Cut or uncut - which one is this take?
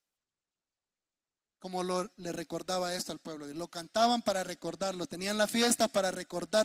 uncut